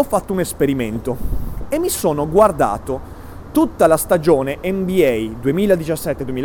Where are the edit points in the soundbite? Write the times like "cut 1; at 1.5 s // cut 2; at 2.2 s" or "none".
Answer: none

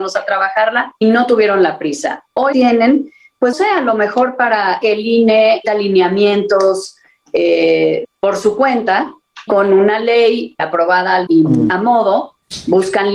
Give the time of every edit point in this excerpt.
cut 1; at 1.0 s // cut 2; at 2.5 s // cut 3; at 3.5 s // cut 4; at 4.8 s // cut 5; at 5.6 s // cut 6; at 8.0 s // cut 7; at 9.5 s // cut 8; at 10.6 s // cut 9; at 11.3 s

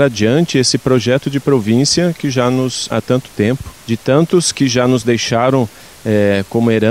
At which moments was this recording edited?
cut 1; at 2.9 s // cut 2; at 3.8 s

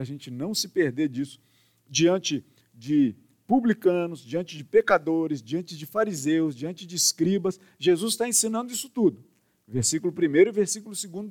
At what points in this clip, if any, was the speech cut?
none

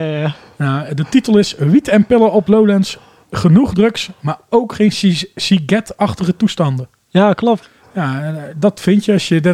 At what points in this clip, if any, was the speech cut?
none

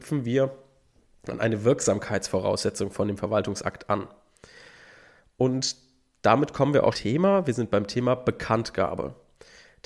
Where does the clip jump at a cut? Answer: cut 1; at 6.9 s

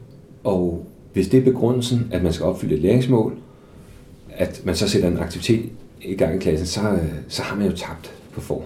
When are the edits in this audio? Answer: none

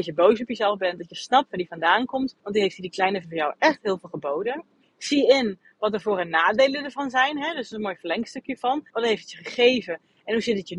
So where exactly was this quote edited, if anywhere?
cut 1; at 2.4 s // cut 2; at 3.2 s // cut 3; at 4.8 s // cut 4; at 8.9 s

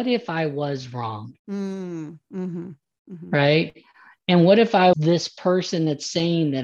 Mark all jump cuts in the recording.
cut 1; at 1.4 s // cut 2; at 4.9 s

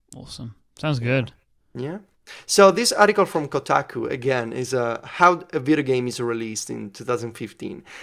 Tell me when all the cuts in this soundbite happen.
none

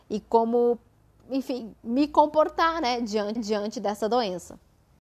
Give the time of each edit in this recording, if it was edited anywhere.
cut 1; at 3.4 s

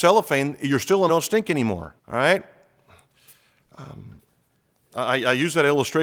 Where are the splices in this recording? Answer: cut 1; at 1.1 s // cut 2; at 2.0 s

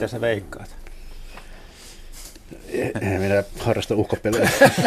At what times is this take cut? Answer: cut 1; at 2.9 s

